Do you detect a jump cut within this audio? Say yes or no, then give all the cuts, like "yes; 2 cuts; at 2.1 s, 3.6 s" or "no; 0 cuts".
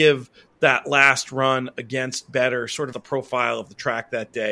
yes; 1 cut; at 2.9 s